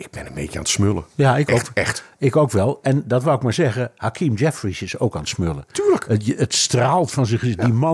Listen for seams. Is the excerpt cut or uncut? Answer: uncut